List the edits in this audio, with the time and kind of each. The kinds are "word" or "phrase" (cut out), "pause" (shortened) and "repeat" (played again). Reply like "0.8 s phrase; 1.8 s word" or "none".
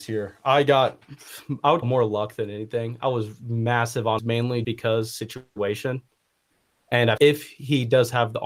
1.8 s word; 4.2 s word; 4.6 s word; 7.2 s word